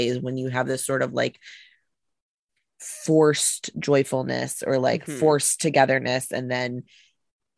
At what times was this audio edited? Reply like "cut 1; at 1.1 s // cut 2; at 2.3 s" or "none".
none

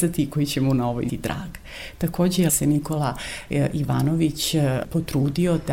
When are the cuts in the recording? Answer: cut 1; at 1.1 s // cut 2; at 2.5 s

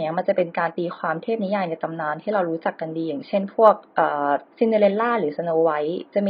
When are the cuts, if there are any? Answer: cut 1; at 4.5 s

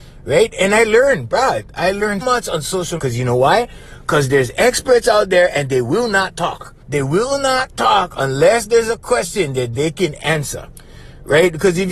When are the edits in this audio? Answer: cut 1; at 2.2 s // cut 2; at 3.0 s // cut 3; at 6.8 s

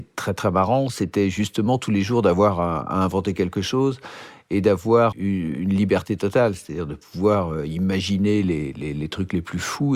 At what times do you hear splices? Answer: cut 1; at 5.1 s

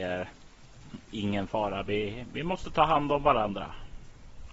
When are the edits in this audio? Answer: none

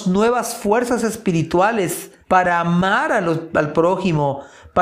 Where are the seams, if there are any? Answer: cut 1; at 2.2 s

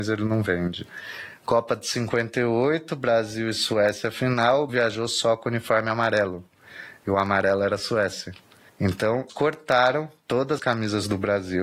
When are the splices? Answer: cut 1; at 4.7 s // cut 2; at 9.3 s // cut 3; at 10.6 s

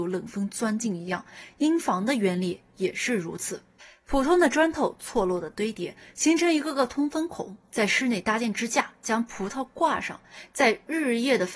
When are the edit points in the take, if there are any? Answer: cut 1; at 3.8 s

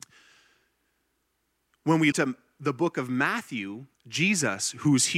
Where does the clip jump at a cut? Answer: cut 1; at 2.1 s // cut 2; at 3.9 s

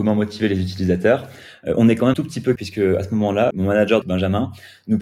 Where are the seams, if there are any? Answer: cut 1; at 2.1 s // cut 2; at 2.6 s // cut 3; at 3.5 s // cut 4; at 4.0 s

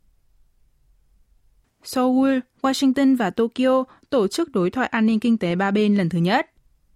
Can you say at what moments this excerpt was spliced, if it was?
none

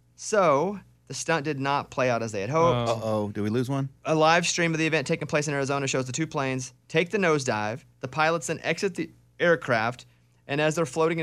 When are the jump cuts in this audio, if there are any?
none

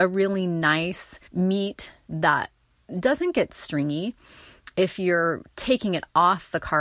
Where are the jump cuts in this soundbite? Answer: cut 1; at 1.2 s

